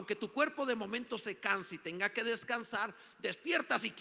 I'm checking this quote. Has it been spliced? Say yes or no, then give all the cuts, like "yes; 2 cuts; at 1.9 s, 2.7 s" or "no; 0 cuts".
no; 0 cuts